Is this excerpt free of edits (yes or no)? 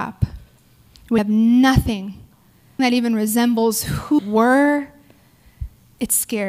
no